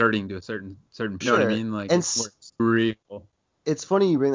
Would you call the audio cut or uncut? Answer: cut